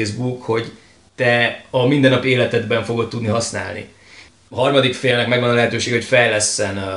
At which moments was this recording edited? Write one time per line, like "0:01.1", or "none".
none